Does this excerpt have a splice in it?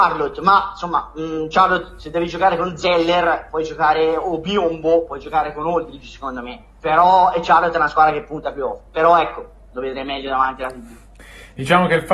no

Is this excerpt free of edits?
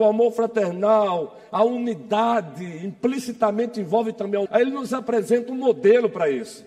no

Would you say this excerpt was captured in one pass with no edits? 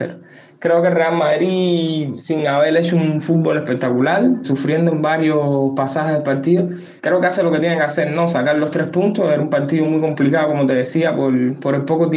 no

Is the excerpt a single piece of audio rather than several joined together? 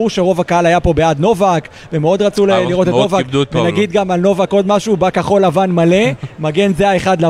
yes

